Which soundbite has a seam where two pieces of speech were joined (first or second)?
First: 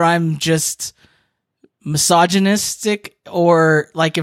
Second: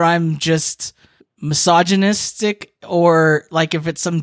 second